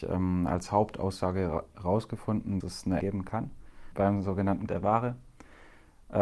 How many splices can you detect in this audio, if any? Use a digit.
3